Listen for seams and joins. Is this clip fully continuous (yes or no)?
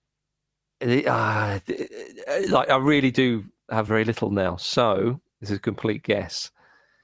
no